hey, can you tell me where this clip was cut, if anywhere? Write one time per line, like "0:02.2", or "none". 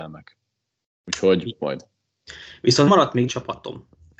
0:01.6
0:02.9
0:03.3